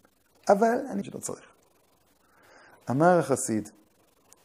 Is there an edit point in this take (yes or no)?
yes